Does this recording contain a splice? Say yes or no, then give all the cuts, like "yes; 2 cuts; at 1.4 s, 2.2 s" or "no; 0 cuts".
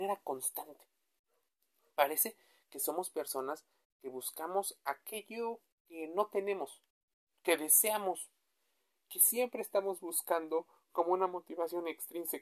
no; 0 cuts